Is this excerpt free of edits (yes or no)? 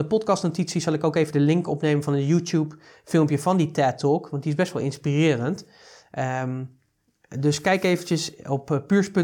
yes